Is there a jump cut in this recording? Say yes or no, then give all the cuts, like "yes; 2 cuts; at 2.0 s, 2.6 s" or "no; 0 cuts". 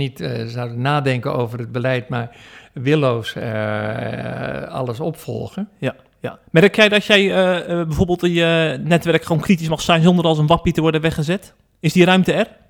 no; 0 cuts